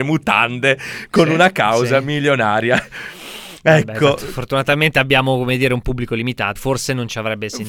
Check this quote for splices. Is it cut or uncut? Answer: cut